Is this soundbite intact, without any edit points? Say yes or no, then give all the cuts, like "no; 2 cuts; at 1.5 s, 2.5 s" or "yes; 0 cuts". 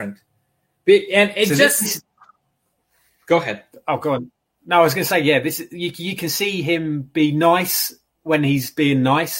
yes; 0 cuts